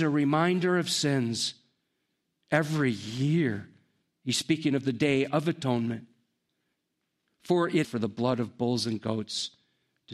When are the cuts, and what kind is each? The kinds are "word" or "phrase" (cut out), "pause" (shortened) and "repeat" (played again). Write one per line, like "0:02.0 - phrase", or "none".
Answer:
0:07.8 - phrase